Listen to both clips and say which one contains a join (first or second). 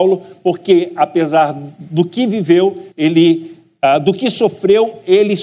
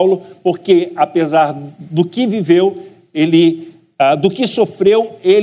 first